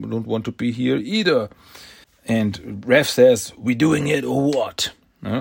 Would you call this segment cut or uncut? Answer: cut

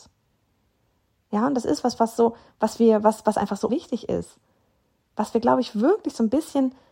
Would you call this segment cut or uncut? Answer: cut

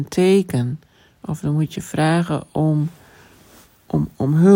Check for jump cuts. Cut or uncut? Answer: uncut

